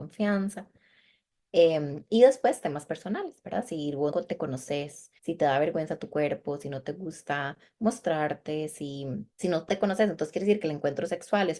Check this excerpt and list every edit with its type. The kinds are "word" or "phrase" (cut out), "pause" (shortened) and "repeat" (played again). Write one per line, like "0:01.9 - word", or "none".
0:04.1 - word
0:05.2 - pause
0:09.3 - pause
0:09.8 - phrase